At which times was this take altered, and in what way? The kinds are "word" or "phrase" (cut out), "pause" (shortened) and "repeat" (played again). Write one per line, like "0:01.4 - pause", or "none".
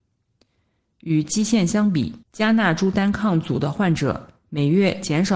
0:02.2 - pause